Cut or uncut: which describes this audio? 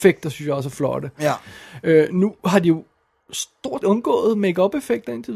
cut